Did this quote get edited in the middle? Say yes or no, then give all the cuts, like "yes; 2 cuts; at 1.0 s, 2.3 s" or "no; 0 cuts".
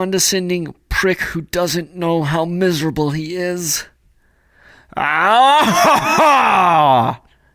no; 0 cuts